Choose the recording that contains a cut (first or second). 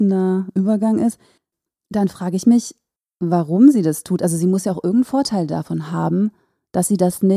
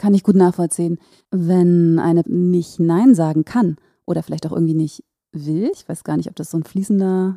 second